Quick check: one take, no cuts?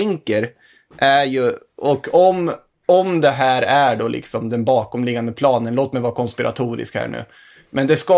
yes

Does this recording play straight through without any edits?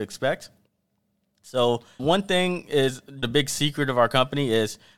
no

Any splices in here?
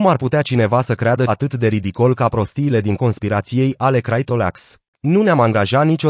yes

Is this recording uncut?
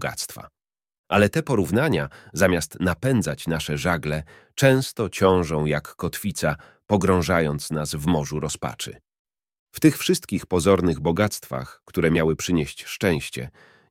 yes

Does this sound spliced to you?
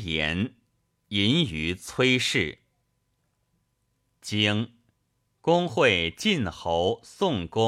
yes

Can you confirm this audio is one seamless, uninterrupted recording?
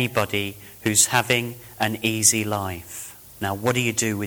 no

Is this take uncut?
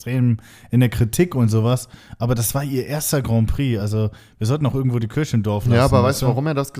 yes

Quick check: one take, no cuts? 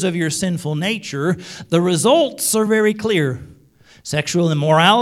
yes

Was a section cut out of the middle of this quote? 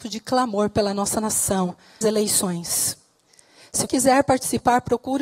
yes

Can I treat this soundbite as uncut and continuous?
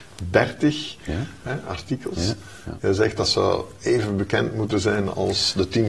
yes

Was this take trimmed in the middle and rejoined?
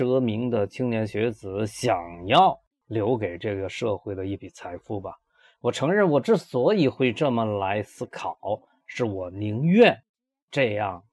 no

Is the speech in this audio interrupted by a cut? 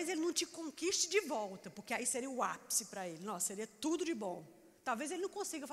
yes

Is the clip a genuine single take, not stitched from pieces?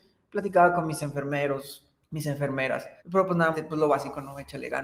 no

